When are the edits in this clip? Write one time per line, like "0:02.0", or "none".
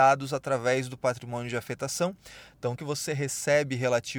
0:02.8